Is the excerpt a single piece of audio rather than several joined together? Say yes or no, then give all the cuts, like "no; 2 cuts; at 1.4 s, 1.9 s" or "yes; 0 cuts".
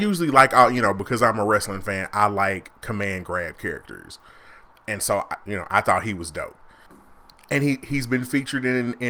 yes; 0 cuts